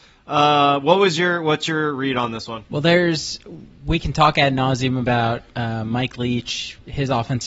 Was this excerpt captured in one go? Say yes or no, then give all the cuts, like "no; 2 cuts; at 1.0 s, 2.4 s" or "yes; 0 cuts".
no; 2 cuts; at 2.7 s, 5.5 s